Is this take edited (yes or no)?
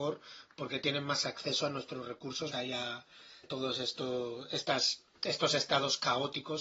yes